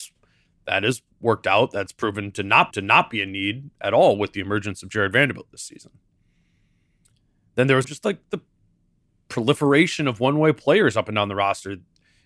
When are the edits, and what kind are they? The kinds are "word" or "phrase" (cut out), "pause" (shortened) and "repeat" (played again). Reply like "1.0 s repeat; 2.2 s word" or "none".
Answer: 1.1 s pause; 2.7 s repeat; 7.8 s word